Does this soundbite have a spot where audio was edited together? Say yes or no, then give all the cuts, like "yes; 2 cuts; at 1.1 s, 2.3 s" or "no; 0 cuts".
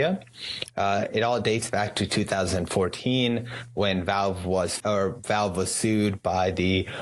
yes; 1 cut; at 4.8 s